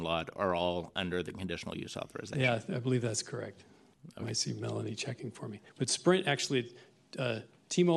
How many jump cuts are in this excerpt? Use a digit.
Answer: 1